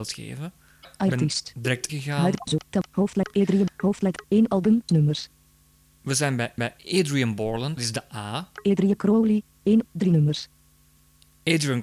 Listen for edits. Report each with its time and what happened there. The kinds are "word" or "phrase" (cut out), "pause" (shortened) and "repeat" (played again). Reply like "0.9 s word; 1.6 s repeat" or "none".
1.9 s phrase; 4.2 s phrase; 4.9 s word; 6.6 s repeat; 7.8 s phrase; 9.8 s word